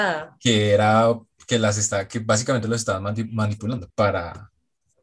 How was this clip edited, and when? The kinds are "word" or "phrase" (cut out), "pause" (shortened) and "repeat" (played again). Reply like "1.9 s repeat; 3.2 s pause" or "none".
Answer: none